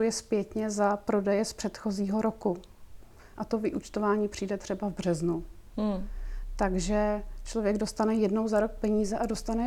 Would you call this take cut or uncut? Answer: uncut